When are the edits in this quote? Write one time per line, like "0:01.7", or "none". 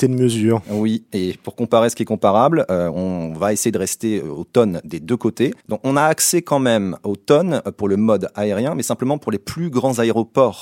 0:05.6